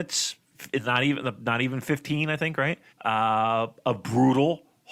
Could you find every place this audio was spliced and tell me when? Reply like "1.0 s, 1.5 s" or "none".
2.9 s